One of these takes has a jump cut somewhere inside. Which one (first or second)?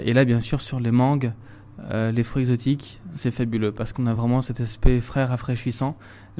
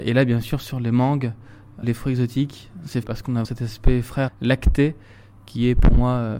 second